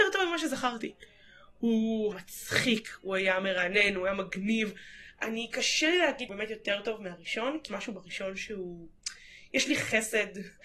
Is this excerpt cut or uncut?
cut